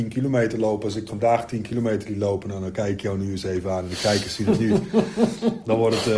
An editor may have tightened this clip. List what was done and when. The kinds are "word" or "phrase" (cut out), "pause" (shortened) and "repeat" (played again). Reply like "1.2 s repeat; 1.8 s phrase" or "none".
1.1 s word